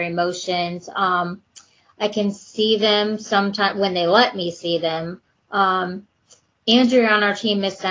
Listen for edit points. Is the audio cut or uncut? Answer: uncut